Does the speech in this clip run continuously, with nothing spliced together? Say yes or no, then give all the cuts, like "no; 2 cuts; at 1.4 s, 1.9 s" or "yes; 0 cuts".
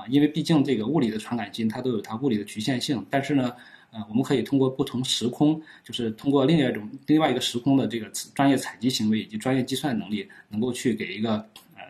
yes; 0 cuts